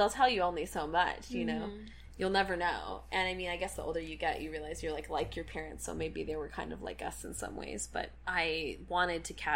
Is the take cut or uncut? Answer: uncut